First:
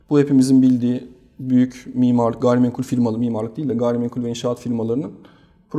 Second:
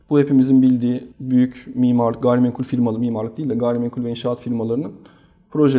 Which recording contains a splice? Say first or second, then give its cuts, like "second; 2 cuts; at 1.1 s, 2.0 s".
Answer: second; 1 cut; at 1.1 s